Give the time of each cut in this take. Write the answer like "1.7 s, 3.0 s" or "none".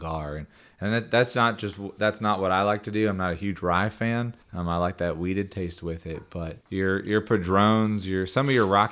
4.4 s, 6.6 s